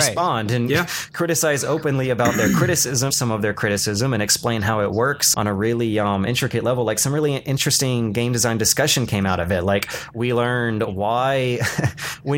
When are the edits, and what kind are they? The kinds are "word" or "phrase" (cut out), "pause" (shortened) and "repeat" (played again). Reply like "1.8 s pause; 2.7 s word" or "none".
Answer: 3.1 s phrase; 5.3 s word

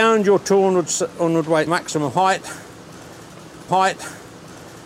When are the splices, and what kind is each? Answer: 1.7 s phrase; 3.7 s repeat

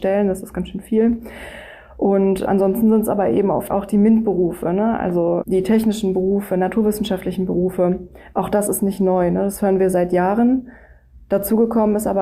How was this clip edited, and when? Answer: none

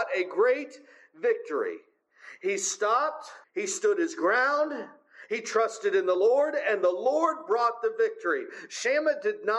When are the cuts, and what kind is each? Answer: 3.4 s pause

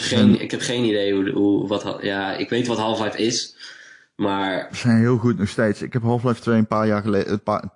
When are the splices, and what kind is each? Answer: none

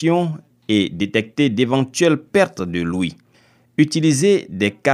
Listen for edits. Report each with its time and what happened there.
none

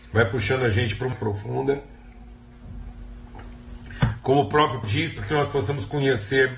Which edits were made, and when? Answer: 1.1 s phrase; 4.8 s word

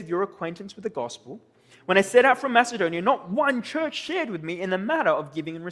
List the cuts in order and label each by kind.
none

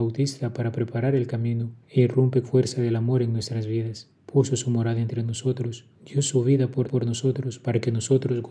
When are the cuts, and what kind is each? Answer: 1.8 s pause; 2.4 s phrase; 4.2 s pause; 5.9 s pause; 6.8 s repeat

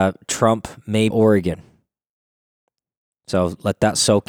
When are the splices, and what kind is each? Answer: 1.1 s phrase

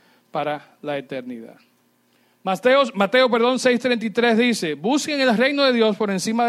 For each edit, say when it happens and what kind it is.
none

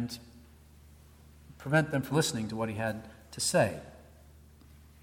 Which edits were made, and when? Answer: 2.1 s word

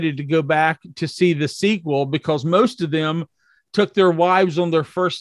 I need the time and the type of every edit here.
none

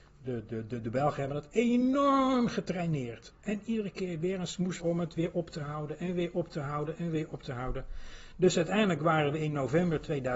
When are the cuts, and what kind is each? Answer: 4.8 s word

